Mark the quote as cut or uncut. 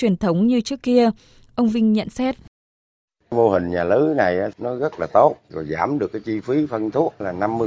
uncut